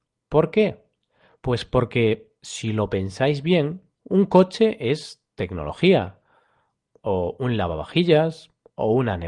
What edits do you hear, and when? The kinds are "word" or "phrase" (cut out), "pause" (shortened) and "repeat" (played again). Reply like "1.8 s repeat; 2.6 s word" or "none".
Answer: none